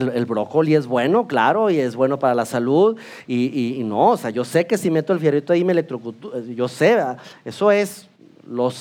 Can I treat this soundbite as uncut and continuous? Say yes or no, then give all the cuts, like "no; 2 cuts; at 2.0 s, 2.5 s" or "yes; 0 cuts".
yes; 0 cuts